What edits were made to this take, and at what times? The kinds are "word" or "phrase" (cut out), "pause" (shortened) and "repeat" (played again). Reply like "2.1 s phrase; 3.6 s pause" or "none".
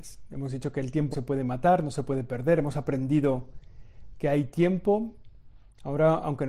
1.1 s word